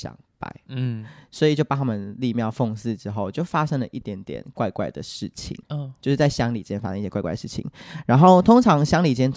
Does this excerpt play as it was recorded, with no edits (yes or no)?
no